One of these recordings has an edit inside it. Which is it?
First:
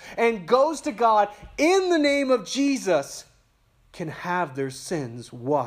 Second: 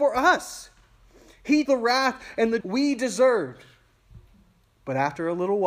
second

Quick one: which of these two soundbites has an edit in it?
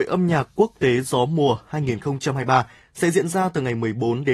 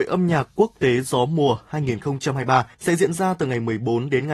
second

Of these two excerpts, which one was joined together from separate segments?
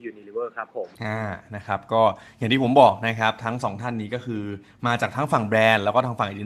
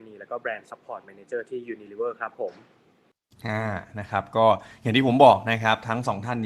first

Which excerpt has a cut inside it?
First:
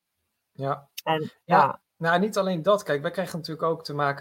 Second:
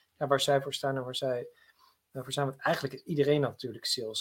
first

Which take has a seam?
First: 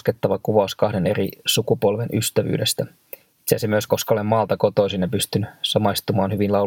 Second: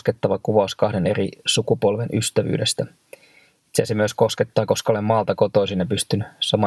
first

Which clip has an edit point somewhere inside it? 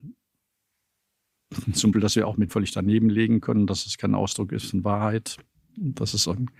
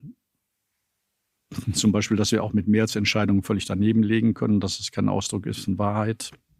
first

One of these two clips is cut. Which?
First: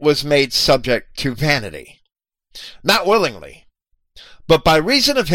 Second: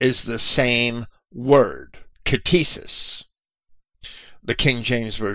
second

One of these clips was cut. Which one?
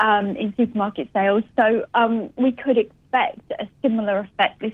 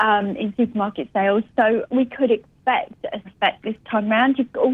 second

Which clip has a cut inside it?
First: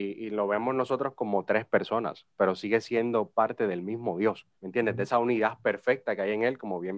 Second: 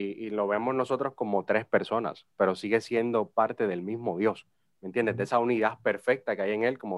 first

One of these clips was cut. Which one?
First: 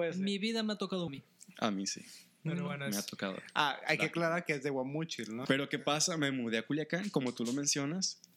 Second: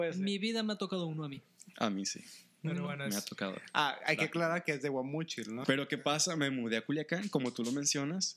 first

